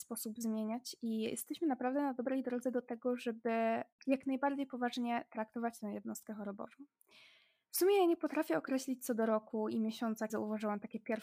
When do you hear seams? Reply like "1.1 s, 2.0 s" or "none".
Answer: 10.3 s